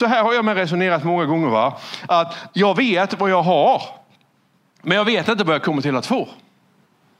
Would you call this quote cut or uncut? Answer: uncut